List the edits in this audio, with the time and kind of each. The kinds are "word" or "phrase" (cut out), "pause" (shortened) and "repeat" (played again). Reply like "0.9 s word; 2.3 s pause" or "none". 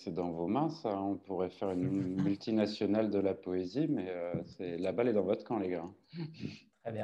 none

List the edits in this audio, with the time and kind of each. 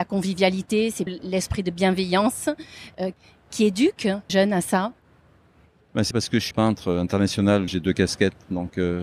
1.1 s word; 4.3 s word; 6.1 s word; 6.5 s word; 7.7 s word

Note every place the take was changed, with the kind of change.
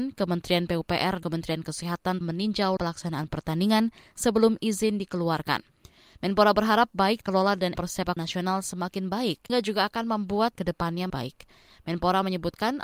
1.2 s word; 2.2 s word; 2.8 s word; 7.2 s word; 7.7 s word; 8.2 s word; 9.5 s word; 10.6 s word; 11.1 s word

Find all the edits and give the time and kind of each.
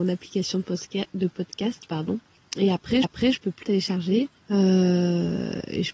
3.0 s repeat; 3.6 s word

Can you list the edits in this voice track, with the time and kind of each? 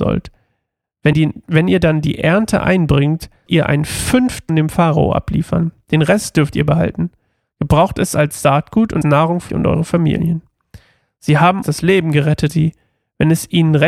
1.1 s word; 3.5 s word; 4.5 s word; 9.0 s word; 9.5 s word; 11.6 s word; 12.5 s word

